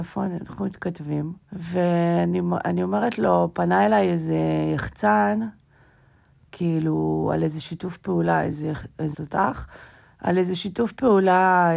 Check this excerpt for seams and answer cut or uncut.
cut